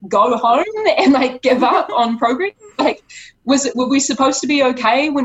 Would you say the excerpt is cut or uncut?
uncut